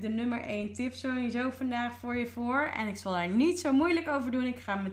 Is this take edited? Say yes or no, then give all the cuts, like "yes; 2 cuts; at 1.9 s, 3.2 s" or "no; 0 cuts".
no; 0 cuts